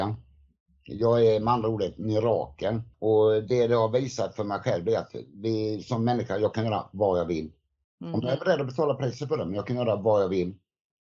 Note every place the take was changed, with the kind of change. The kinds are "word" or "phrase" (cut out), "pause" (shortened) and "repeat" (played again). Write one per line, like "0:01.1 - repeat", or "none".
0:02.9 - pause
0:07.8 - pause

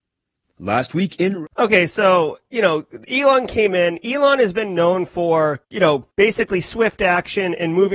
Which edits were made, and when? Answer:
0:01.5 - pause
0:03.0 - pause
0:05.6 - pause
0:06.1 - pause

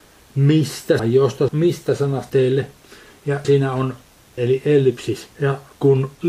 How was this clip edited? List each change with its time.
0:01.0 - word
0:01.5 - word
0:02.3 - word
0:03.4 - word
0:04.4 - word

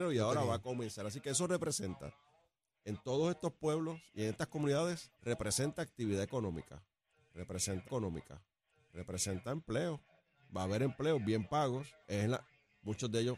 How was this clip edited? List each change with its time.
0:05.1 - pause
0:07.8 - repeat
0:12.0 - pause

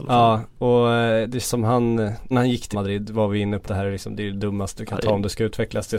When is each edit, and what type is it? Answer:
0:01.4 - word
0:02.3 - word
0:02.7 - word
0:03.6 - word
0:04.8 - word

